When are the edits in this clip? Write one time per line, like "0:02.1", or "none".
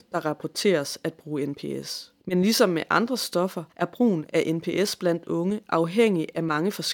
0:02.2
0:03.7